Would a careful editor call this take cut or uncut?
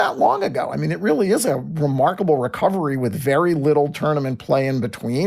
uncut